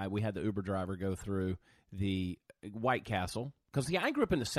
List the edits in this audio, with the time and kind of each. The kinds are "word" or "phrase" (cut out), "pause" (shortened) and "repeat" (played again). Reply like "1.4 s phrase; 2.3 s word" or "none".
none